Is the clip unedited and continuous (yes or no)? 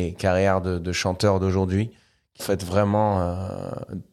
no